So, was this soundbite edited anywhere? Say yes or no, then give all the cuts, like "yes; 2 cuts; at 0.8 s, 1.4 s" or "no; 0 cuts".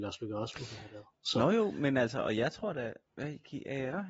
yes; 1 cut; at 3.1 s